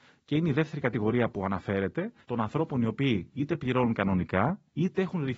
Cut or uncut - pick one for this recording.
cut